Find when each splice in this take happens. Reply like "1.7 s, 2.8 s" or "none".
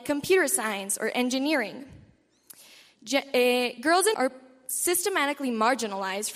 4.1 s

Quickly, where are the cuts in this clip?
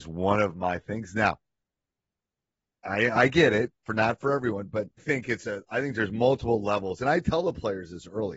5.0 s

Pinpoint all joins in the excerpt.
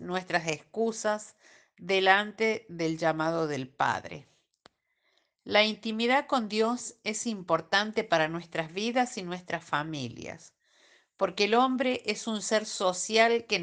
none

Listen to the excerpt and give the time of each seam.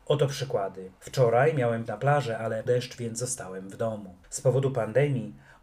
1.0 s, 1.9 s, 2.7 s, 4.2 s

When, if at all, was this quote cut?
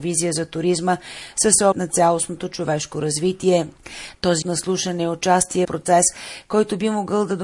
1.7 s, 4.4 s, 5.6 s

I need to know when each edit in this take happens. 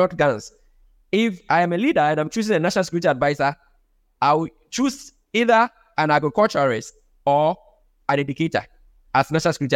none

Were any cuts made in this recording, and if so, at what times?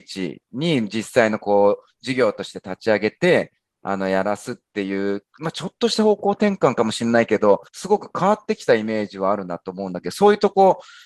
7.7 s

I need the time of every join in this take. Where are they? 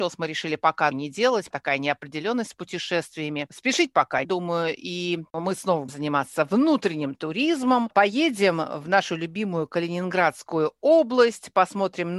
0.9 s, 1.5 s, 4.2 s, 5.9 s

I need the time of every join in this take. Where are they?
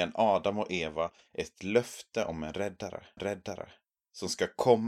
3.2 s

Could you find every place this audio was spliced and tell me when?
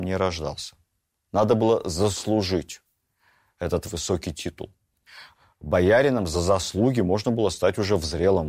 none

